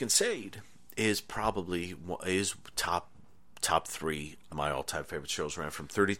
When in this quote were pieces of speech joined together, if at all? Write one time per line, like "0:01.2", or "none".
0:04.5